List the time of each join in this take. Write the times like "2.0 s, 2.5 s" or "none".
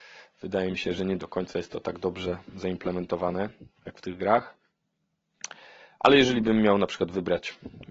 3.8 s